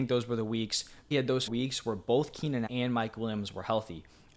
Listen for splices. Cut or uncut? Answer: cut